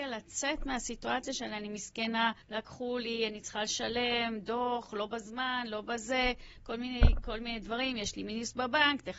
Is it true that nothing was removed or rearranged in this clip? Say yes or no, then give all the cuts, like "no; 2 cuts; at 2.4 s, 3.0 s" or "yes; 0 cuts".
no; 1 cut; at 2.4 s